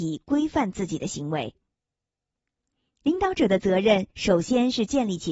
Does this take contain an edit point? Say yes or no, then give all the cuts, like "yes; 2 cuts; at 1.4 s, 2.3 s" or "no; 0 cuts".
yes; 1 cut; at 4.1 s